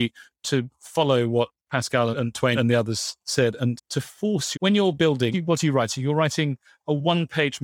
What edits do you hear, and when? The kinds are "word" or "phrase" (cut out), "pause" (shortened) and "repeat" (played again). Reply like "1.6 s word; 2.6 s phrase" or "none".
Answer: 2.1 s word; 2.5 s word; 3.8 s word; 4.5 s word; 5.3 s word

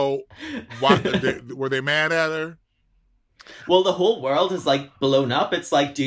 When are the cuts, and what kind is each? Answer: 5.0 s pause

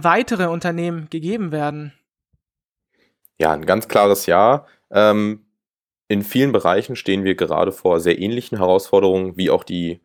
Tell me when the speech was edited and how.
none

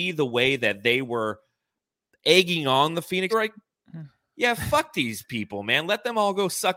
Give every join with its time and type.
3.3 s phrase

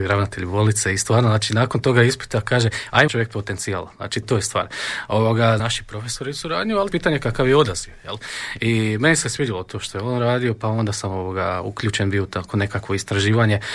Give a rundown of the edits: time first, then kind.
3.1 s phrase; 4.2 s word; 5.6 s word; 6.9 s phrase

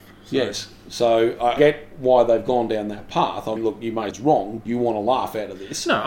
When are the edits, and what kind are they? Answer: 3.6 s word; 4.1 s word; 4.6 s word

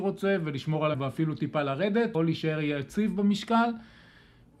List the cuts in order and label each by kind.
0.9 s word; 2.1 s word

